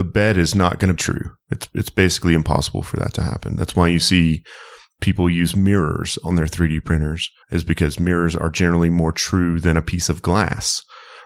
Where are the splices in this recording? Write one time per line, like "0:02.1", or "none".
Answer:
0:01.0
0:07.4